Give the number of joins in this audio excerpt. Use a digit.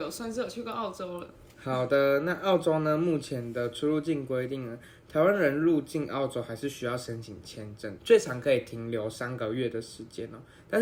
2